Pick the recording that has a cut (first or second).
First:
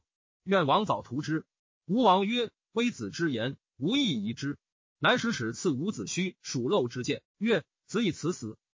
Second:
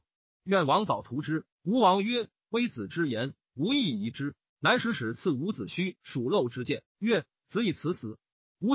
second